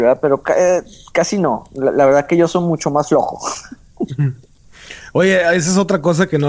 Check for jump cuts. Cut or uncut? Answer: uncut